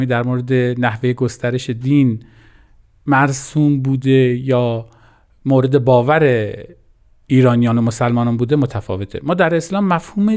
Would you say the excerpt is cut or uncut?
uncut